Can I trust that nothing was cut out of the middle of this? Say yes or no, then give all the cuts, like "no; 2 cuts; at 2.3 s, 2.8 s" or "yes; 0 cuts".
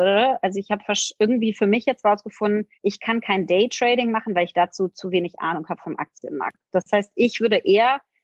no; 1 cut; at 2.7 s